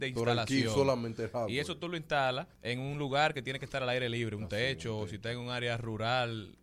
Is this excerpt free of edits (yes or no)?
no